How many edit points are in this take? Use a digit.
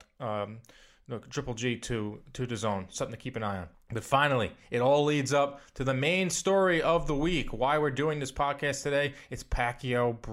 1